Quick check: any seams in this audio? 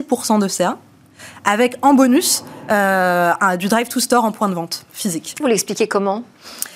yes; 1 cut; at 5.4 s

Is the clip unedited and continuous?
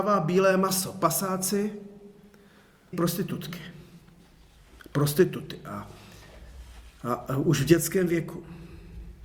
no; 1 cut; at 2.9 s

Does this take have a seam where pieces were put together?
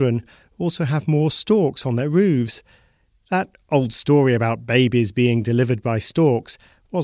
no; 0 cuts

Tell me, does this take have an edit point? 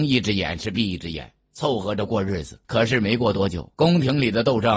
yes; 2 cuts; at 2.6 s, 3.7 s

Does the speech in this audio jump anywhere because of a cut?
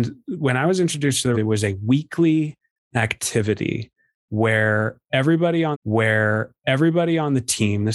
yes; 2 cuts; at 1.3 s, 5.7 s

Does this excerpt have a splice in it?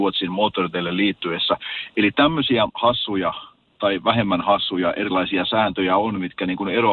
yes; 1 cut; at 2.7 s

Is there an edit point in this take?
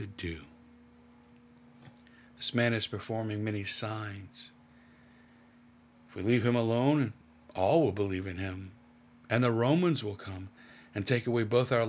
no; 0 cuts

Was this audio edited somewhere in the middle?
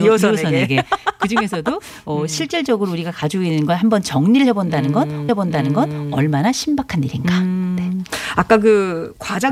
yes; 1 cut; at 5.3 s

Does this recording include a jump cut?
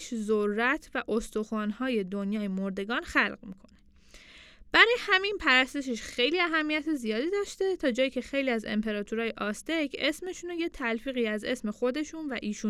no; 0 cuts

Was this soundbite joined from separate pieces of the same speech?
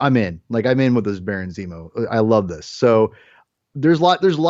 no; 0 cuts

